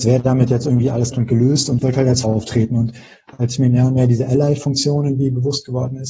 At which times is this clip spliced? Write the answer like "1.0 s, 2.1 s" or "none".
1.1 s, 1.8 s, 2.2 s